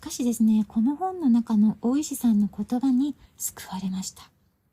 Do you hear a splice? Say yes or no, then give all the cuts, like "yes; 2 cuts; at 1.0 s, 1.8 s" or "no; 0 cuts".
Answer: yes; 1 cut; at 3.2 s